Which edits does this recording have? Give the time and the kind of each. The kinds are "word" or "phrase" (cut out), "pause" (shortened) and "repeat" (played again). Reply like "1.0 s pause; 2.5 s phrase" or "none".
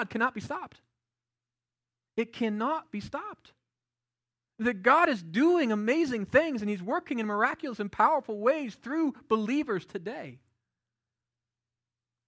none